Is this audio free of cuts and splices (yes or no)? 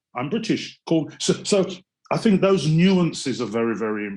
yes